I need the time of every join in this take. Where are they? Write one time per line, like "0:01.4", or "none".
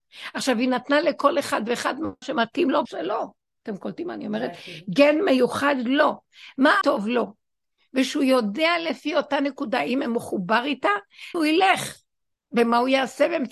0:02.2
0:02.8
0:06.8
0:11.3